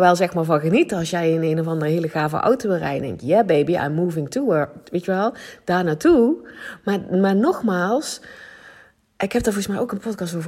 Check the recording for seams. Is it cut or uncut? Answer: uncut